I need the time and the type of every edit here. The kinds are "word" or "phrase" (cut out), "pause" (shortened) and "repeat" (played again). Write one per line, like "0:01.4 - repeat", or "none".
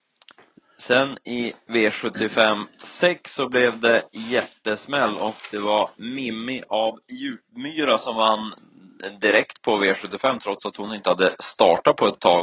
none